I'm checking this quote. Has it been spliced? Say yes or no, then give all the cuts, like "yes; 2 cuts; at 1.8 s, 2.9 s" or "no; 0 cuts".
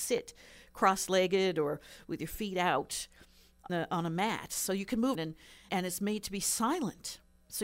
yes; 3 cuts; at 3.7 s, 5.1 s, 5.7 s